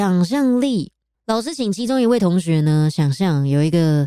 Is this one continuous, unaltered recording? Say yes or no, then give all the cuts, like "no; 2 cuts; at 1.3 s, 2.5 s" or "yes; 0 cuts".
no; 1 cut; at 1.1 s